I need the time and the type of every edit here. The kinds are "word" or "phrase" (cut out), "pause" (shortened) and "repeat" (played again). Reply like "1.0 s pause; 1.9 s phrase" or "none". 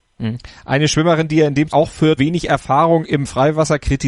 1.7 s word; 2.2 s word